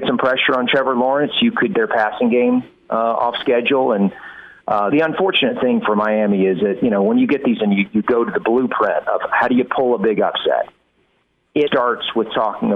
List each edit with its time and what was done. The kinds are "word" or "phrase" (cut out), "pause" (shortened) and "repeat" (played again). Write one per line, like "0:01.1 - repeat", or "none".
0:01.7 - word
0:04.9 - word
0:07.6 - word
0:07.9 - word
0:11.7 - word